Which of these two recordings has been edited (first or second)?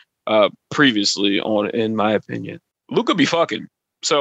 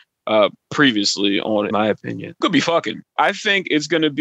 second